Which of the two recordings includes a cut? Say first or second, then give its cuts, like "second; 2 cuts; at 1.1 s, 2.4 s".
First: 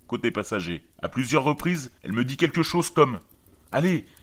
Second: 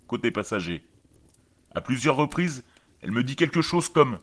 first; 2 cuts; at 0.9 s, 2.0 s